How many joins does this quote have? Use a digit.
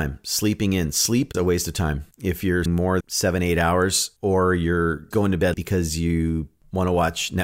6